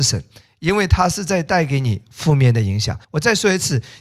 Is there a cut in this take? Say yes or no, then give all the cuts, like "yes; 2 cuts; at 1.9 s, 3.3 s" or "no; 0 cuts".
yes; 1 cut; at 3.0 s